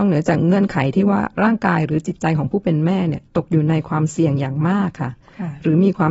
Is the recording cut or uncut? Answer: uncut